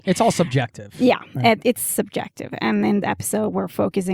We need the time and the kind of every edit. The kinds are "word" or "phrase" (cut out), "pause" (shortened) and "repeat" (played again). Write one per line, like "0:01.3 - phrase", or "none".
0:03.0 - word